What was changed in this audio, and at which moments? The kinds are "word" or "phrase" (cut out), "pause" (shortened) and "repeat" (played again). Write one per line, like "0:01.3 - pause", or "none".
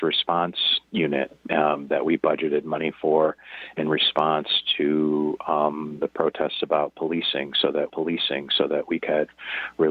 0:07.9 - repeat